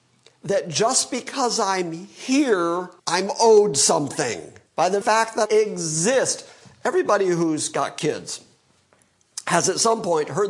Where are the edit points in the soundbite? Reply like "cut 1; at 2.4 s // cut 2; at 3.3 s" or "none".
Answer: cut 1; at 3.0 s // cut 2; at 4.7 s // cut 3; at 5.0 s // cut 4; at 5.5 s